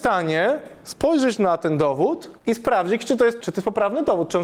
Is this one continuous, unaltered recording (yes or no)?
no